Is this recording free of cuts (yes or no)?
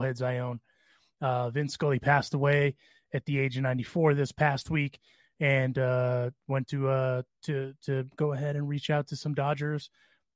yes